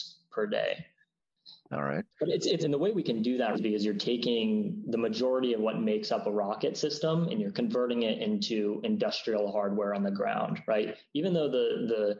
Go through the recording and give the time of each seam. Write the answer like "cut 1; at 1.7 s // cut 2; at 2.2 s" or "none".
cut 1; at 2.1 s // cut 2; at 2.6 s // cut 3; at 3.5 s